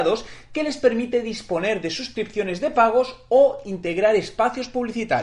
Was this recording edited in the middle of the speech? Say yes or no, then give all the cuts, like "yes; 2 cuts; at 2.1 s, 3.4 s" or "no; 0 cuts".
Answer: no; 0 cuts